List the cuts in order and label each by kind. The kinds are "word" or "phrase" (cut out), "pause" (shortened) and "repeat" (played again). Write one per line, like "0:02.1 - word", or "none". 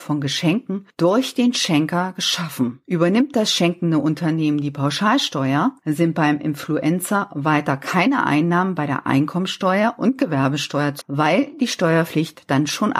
0:11.0 - word